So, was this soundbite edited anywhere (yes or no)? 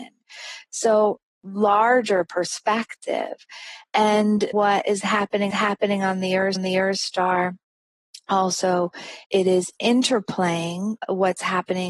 yes